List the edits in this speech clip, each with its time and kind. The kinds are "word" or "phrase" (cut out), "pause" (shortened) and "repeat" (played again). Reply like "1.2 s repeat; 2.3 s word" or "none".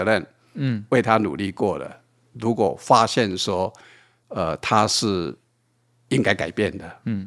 none